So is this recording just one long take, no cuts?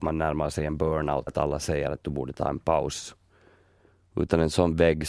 no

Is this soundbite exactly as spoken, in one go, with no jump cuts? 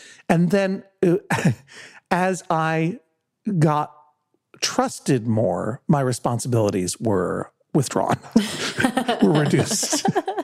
yes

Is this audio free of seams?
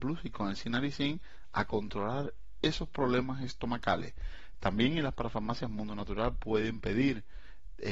yes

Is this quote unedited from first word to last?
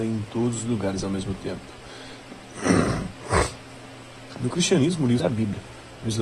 no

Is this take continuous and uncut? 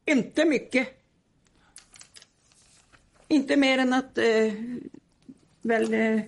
yes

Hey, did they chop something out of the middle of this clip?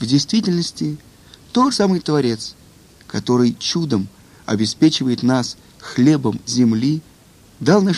yes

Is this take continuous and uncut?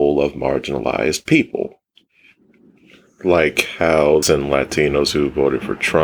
no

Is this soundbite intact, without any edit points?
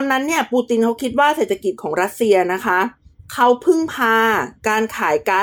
yes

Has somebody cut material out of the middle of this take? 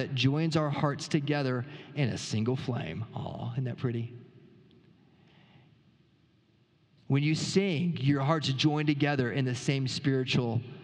no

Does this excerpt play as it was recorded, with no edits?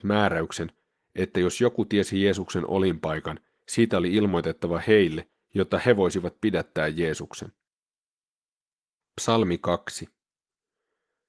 yes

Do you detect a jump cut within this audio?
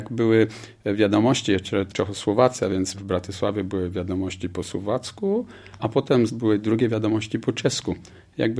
yes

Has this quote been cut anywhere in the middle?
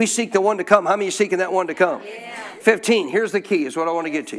no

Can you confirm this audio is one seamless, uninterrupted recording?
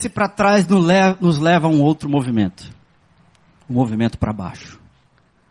yes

